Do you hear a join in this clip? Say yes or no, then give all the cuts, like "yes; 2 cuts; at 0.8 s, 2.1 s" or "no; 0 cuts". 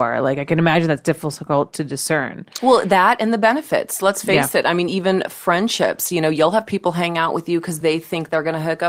no; 0 cuts